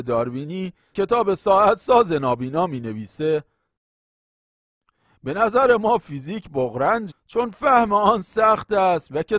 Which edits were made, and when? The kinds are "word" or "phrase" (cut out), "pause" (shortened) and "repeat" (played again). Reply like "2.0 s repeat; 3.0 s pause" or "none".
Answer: 0.9 s word; 7.1 s word